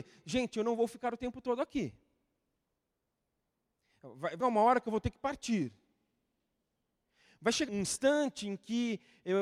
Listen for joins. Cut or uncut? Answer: cut